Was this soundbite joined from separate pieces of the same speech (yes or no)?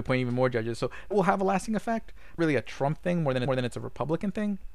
yes